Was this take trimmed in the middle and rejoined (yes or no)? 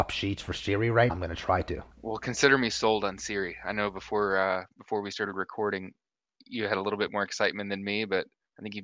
yes